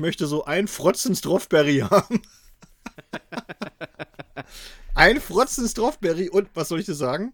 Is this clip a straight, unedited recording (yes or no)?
yes